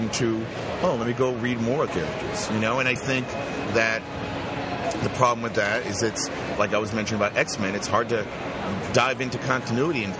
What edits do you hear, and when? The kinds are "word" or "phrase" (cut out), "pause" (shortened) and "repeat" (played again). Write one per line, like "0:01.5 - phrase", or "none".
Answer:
0:01.9 - word
0:03.0 - word
0:06.5 - word